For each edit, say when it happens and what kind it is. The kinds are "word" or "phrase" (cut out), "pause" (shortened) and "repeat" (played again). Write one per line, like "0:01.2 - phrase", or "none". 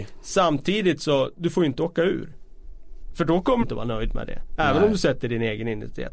0:03.6 - word